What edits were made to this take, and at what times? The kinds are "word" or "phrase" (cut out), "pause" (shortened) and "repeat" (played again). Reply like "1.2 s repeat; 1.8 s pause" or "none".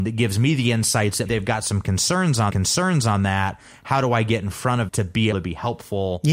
1.3 s word; 2.5 s repeat; 4.9 s word; 5.3 s word